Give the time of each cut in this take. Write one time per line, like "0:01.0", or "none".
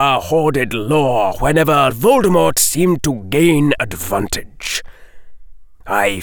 0:01.9
0:03.8